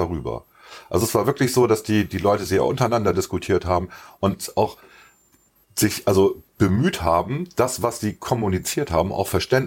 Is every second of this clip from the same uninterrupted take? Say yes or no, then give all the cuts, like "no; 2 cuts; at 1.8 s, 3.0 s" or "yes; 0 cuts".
yes; 0 cuts